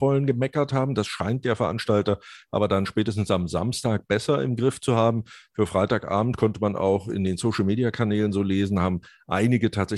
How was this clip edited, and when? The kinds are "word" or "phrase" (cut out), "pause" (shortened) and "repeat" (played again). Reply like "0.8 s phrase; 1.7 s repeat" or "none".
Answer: none